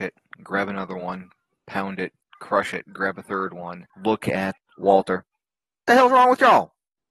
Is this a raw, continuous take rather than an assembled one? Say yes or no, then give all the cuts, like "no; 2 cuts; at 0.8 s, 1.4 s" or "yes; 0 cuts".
yes; 0 cuts